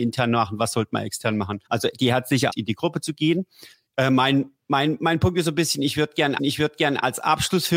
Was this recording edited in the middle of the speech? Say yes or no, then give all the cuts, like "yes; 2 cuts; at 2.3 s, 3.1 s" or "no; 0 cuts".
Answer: yes; 4 cuts; at 1.7 s, 2.5 s, 3.7 s, 6.4 s